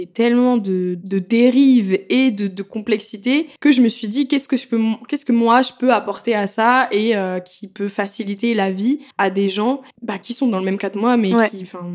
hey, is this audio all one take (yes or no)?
no